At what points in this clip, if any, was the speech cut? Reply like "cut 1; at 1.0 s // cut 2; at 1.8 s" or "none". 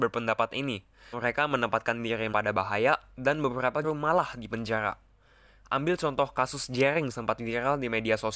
cut 1; at 1.1 s // cut 2; at 2.3 s // cut 3; at 3.8 s // cut 4; at 7.1 s